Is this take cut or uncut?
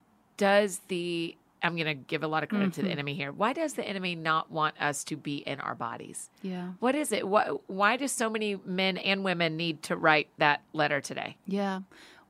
uncut